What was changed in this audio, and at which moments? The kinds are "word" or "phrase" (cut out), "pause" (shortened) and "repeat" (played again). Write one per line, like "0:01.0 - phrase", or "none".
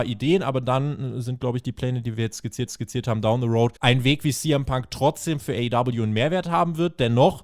0:02.7 - repeat
0:03.8 - pause

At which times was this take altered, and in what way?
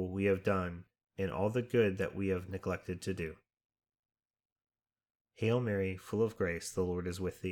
none

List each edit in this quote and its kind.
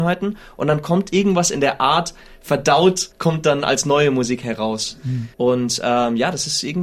0:03.1 - pause
0:05.3 - pause

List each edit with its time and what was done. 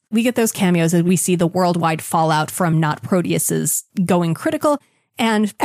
none

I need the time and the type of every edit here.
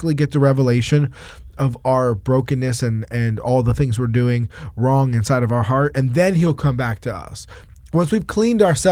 none

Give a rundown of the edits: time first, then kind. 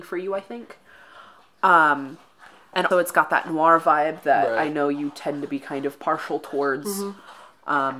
0:02.9 - word

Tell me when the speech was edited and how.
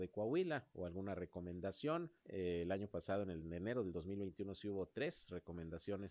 0:02.2 - pause

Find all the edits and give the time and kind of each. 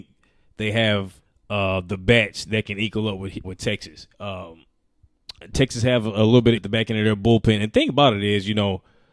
0:01.3 - pause
0:03.4 - word
0:04.1 - pause
0:06.6 - word

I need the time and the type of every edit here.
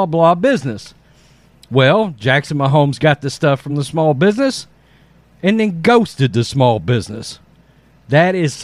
none

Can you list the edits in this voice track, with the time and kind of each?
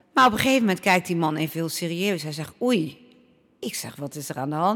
none

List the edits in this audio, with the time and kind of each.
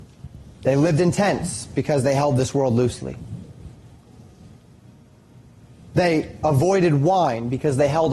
none

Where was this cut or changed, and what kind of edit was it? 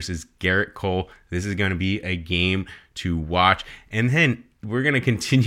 none

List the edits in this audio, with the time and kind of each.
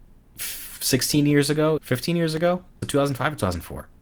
0:01.8 - word
0:02.8 - word

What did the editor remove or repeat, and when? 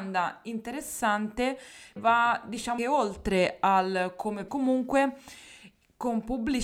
0:02.0 - word
0:02.8 - word
0:04.5 - phrase

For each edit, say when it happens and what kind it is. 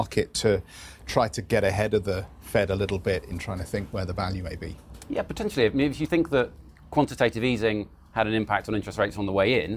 none

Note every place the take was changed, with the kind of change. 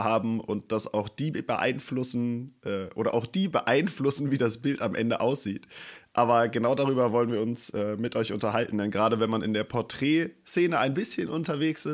none

